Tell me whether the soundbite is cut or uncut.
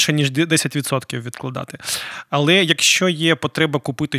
uncut